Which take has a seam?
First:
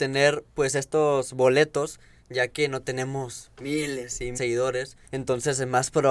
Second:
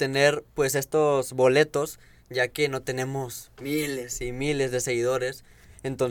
first; 2 cuts; at 4.3 s, 5.1 s

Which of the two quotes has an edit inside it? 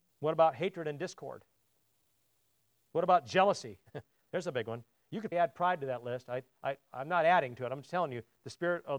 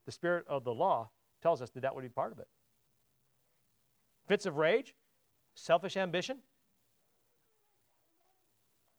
first; 1 cut; at 5.3 s

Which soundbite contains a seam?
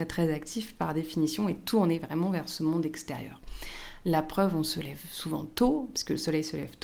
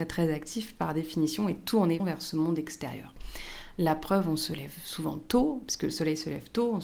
second; 1 cut; at 2.0 s

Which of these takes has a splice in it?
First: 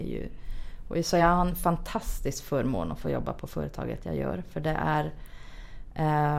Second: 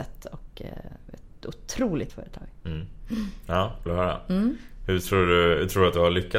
second; 2 cuts; at 2.1 s, 3.9 s

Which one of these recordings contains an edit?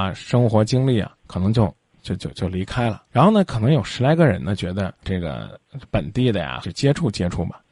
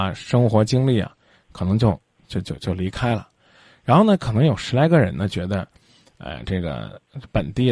first; 4 cuts; at 1.2 s, 3.1 s, 5.0 s, 6.6 s

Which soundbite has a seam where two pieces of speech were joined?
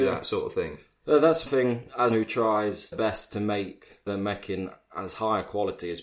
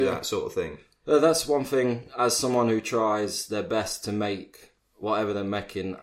first; 4 cuts; at 1.5 s, 2.1 s, 2.9 s, 4.1 s

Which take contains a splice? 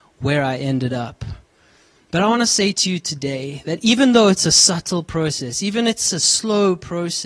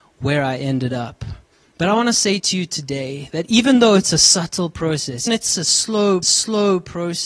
second; 3 cuts; at 1.5 s, 5.3 s, 6.2 s

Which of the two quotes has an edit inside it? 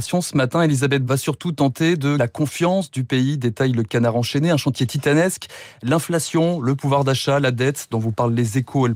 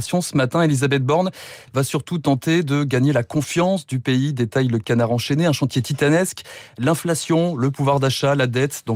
first; 2 cuts; at 1.0 s, 2.2 s

